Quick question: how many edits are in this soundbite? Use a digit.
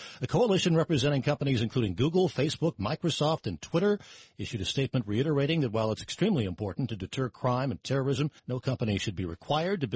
1